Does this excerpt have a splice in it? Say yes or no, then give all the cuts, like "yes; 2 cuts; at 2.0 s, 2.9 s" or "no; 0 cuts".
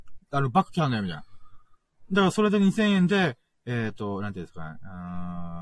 no; 0 cuts